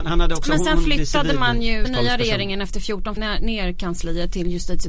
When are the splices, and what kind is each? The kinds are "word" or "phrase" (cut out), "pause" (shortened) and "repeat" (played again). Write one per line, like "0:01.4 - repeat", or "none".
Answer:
0:01.8 - word
0:03.2 - phrase